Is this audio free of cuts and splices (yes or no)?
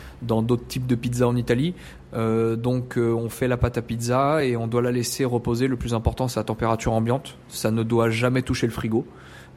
yes